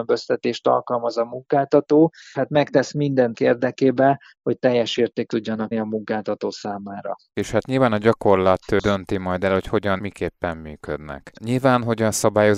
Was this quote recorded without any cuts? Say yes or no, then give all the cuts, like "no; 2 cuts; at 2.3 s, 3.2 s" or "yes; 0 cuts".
no; 6 cuts; at 2.3 s, 3.3 s, 4.6 s, 5.3 s, 5.7 s, 10.0 s